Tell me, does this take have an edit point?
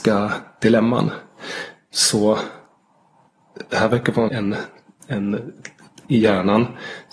yes; 2 cuts; at 4.3 s, 6.0 s

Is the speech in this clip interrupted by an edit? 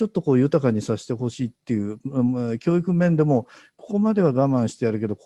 yes; 1 cut; at 1.5 s

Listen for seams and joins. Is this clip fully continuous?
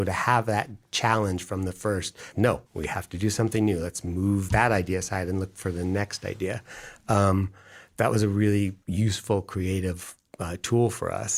no; 4 cuts; at 2.3 s, 2.7 s, 4.5 s, 8.8 s

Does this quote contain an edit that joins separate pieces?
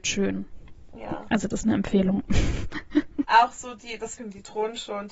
yes; 3 cuts; at 1.5 s, 3.2 s, 4.2 s

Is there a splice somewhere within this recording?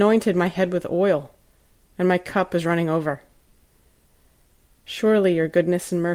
no; 0 cuts

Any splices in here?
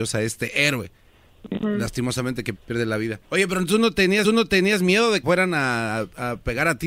yes; 5 cuts; at 1.4 s, 2.5 s, 3.2 s, 4.2 s, 5.2 s

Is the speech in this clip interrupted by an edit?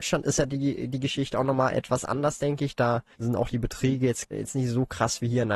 yes; 2 cuts; at 3.1 s, 4.3 s

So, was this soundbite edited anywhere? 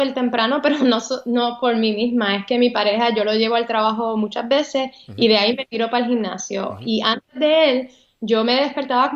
no; 0 cuts

